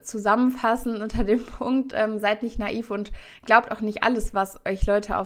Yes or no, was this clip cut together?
no